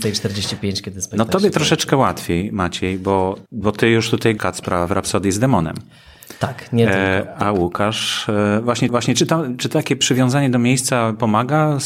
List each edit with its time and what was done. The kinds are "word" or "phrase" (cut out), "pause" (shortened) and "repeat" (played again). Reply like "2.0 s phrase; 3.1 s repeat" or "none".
3.5 s pause; 4.4 s word; 8.9 s repeat